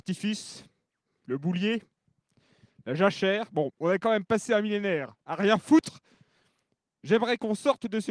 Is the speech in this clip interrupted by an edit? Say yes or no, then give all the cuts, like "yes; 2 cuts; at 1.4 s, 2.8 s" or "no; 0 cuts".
no; 0 cuts